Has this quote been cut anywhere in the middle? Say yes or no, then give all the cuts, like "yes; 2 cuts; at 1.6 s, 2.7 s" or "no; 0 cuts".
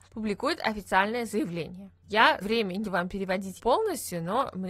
yes; 3 cuts; at 2.4 s, 2.8 s, 3.6 s